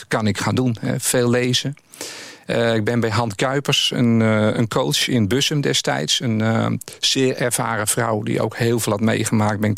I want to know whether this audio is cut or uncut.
uncut